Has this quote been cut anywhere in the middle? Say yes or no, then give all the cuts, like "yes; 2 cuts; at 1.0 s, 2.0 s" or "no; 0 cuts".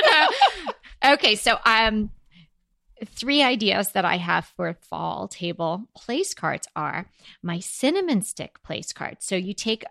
no; 0 cuts